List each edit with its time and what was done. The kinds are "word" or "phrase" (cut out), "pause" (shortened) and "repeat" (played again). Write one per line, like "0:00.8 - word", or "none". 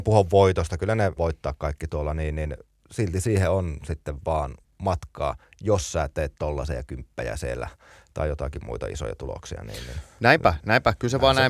0:01.2 - word
0:04.6 - pause